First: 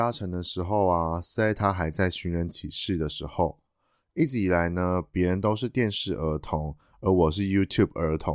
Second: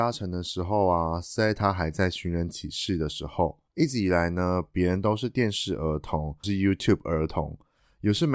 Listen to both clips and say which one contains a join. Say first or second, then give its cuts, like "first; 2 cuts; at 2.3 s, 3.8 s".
second; 2 cuts; at 3.7 s, 6.4 s